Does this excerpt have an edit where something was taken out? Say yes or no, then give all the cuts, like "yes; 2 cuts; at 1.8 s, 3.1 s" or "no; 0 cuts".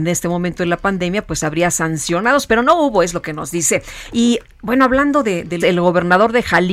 yes; 1 cut; at 5.6 s